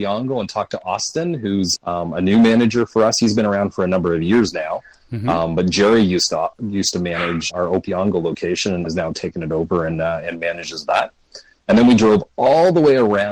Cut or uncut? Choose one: cut